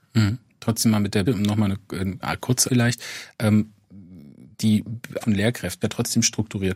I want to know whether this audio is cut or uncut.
cut